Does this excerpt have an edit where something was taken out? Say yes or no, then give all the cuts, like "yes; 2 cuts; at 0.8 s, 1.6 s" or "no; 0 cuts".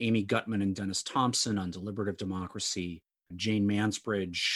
no; 0 cuts